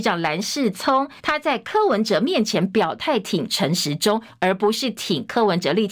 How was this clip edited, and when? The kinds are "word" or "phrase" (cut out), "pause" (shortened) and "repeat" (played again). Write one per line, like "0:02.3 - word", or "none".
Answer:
0:01.2 - pause